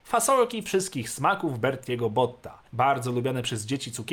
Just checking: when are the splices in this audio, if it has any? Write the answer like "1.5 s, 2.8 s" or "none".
2.7 s